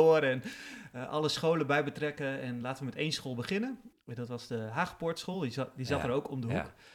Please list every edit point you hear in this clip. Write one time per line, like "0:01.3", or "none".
none

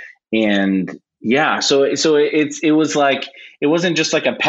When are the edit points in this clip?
none

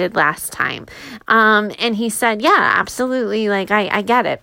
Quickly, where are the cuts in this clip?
none

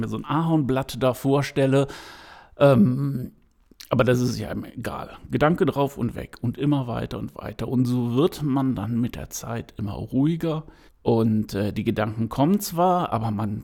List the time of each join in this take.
0:10.9

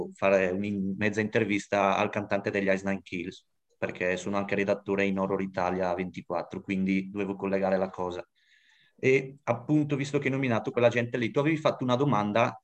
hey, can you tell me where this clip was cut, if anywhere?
0:10.7

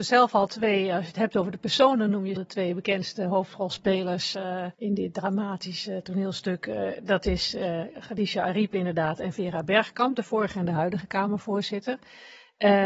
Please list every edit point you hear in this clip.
0:02.4
0:04.7

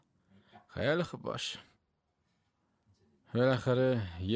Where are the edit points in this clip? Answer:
none

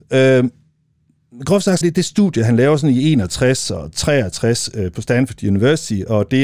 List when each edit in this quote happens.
0:01.8

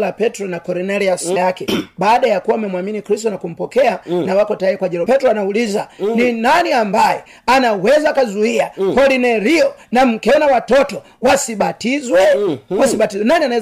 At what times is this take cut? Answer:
0:01.4
0:05.1

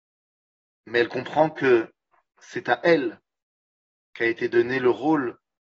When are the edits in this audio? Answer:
none

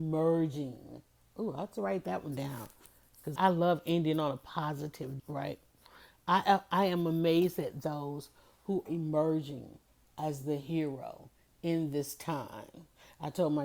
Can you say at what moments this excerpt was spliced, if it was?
0:03.4
0:05.2
0:08.9

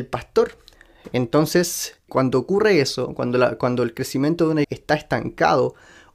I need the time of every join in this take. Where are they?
0:02.1
0:04.6

